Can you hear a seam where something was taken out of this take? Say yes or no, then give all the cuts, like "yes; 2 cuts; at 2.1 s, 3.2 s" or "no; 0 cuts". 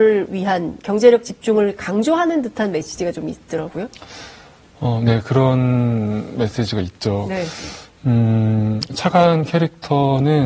no; 0 cuts